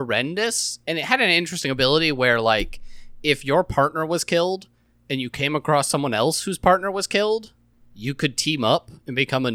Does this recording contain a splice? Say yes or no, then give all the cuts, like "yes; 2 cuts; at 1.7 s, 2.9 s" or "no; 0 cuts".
no; 0 cuts